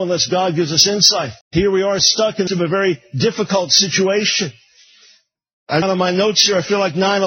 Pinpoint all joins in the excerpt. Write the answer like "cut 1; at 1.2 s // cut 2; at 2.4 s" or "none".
cut 1; at 1.4 s // cut 2; at 2.0 s // cut 3; at 2.5 s // cut 4; at 5.8 s